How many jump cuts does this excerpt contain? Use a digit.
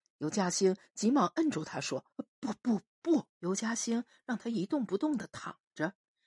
2